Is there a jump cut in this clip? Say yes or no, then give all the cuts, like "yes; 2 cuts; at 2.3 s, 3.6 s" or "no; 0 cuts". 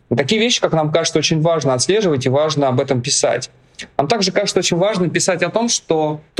no; 0 cuts